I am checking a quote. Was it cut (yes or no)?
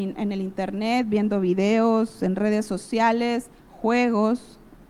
yes